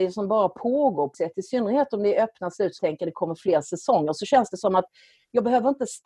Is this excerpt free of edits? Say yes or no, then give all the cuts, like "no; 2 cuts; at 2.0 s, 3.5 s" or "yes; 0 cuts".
no; 2 cuts; at 1.1 s, 2.8 s